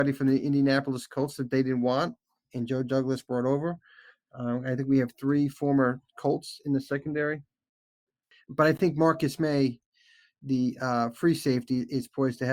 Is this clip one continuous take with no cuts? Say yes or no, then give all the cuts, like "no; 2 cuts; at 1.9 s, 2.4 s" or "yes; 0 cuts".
yes; 0 cuts